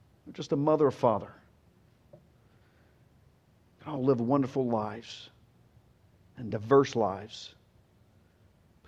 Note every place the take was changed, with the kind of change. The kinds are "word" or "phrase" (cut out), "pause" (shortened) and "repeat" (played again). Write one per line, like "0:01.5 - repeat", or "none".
none